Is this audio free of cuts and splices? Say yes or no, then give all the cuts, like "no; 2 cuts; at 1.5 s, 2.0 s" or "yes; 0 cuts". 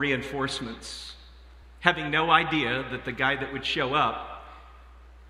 yes; 0 cuts